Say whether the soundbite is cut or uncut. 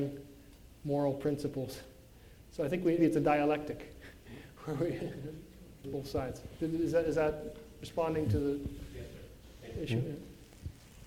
cut